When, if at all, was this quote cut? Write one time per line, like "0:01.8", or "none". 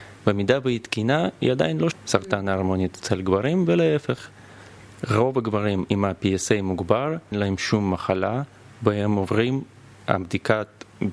0:01.9
0:07.3